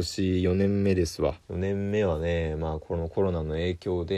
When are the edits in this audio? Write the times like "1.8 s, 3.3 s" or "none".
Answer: 1.4 s